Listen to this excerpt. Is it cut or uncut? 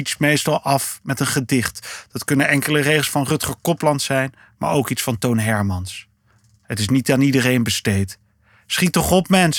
uncut